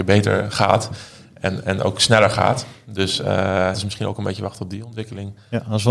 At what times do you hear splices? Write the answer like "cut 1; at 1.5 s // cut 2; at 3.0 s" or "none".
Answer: cut 1; at 3.7 s